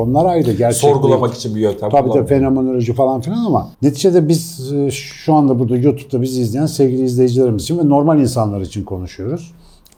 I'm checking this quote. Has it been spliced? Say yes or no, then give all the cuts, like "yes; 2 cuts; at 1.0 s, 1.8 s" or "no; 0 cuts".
yes; 1 cut; at 3.7 s